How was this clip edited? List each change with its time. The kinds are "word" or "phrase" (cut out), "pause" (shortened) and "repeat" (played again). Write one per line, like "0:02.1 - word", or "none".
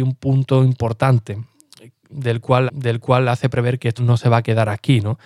0:02.7 - repeat
0:04.0 - word